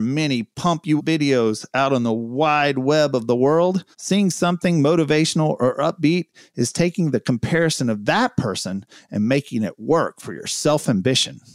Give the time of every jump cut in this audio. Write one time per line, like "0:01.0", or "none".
0:01.0
0:03.9